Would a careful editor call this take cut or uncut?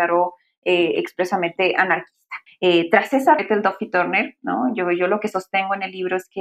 cut